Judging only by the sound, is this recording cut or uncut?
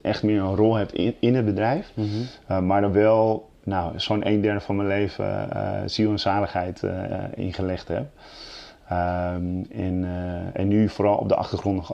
uncut